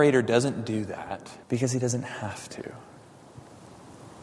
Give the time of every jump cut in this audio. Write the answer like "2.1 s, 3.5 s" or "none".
1.4 s